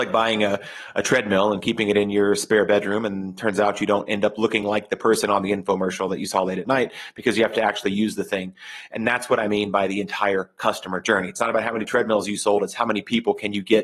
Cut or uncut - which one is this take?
uncut